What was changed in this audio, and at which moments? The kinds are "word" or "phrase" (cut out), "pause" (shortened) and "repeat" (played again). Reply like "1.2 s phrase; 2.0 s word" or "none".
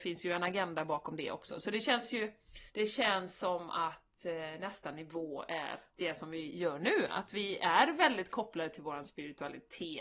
2.7 s pause; 5.9 s pause